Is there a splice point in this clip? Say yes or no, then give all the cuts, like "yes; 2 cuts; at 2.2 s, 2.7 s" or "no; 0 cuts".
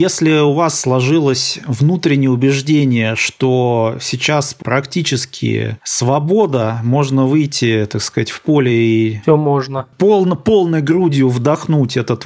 yes; 1 cut; at 4.6 s